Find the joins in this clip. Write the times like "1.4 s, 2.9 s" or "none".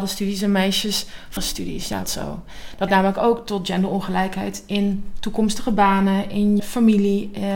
1.4 s, 2.0 s, 2.9 s, 6.6 s